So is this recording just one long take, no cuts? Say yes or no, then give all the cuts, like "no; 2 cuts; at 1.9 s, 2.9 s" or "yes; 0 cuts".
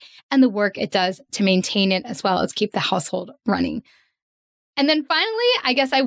yes; 0 cuts